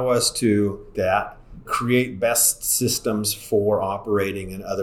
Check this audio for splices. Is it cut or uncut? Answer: cut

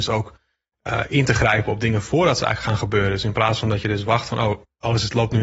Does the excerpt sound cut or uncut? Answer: uncut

